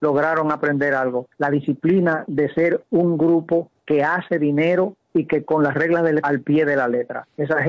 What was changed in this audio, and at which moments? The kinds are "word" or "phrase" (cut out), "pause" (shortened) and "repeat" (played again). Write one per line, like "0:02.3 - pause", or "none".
0:01.3 - pause
0:05.4 - word
0:06.2 - word